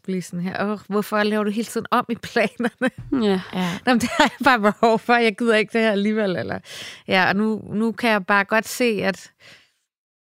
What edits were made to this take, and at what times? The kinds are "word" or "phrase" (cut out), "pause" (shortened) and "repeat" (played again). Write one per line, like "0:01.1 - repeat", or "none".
none